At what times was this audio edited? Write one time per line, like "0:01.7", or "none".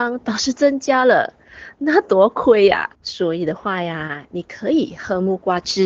0:02.9